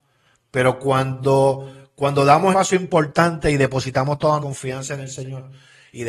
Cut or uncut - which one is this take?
cut